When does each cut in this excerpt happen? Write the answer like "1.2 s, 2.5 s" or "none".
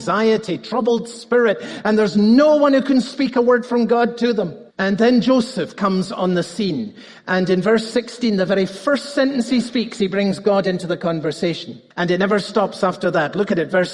4.7 s, 11.9 s